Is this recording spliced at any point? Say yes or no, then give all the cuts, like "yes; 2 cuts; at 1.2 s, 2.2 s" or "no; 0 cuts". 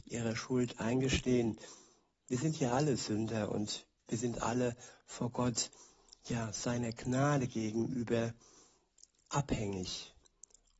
no; 0 cuts